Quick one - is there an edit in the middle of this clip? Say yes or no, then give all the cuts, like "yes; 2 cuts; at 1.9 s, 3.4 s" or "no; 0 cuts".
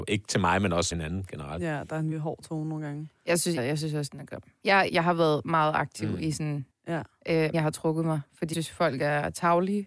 yes; 7 cuts; at 0.9 s, 2.1 s, 3.6 s, 4.9 s, 6.7 s, 7.5 s, 8.5 s